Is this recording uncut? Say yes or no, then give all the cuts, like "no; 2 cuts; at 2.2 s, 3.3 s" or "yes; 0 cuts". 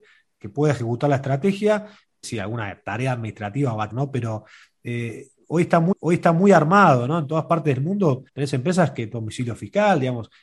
no; 5 cuts; at 2.2 s, 3.9 s, 5.9 s, 8.3 s, 9.1 s